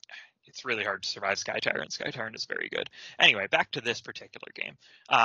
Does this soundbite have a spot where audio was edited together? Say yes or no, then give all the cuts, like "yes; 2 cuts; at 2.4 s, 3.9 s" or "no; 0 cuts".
no; 0 cuts